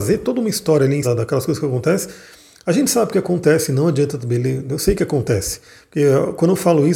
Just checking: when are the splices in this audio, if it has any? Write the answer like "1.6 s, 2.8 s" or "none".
1.0 s